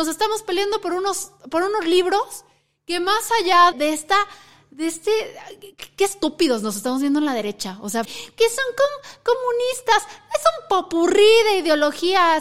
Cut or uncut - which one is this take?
cut